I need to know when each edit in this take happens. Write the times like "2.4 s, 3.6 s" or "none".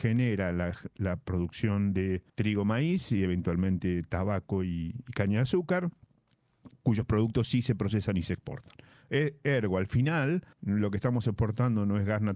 2.3 s, 6.8 s, 10.5 s